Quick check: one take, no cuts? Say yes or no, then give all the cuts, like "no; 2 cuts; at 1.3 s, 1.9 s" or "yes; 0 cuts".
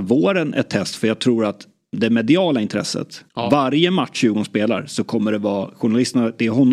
no; 1 cut; at 3.3 s